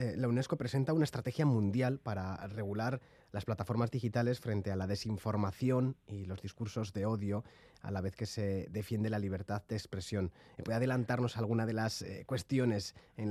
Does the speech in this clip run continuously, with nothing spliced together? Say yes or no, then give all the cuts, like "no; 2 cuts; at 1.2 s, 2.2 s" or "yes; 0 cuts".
yes; 0 cuts